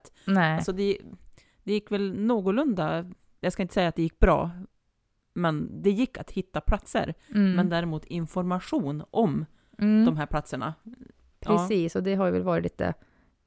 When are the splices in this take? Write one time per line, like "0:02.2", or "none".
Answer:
none